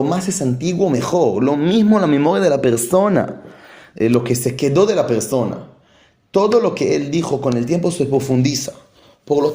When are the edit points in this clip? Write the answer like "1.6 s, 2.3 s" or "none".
none